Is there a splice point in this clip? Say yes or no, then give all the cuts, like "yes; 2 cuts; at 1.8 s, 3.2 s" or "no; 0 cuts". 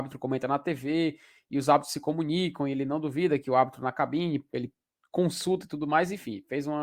no; 0 cuts